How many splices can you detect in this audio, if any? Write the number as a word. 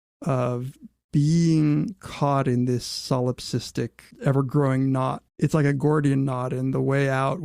two